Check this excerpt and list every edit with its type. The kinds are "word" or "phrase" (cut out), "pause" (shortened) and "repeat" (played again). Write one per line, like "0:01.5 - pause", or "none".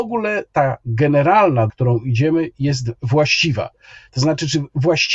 0:01.7 - word